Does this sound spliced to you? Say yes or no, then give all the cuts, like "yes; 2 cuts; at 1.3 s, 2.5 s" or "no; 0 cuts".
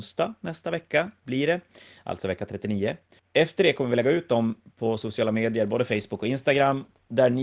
no; 0 cuts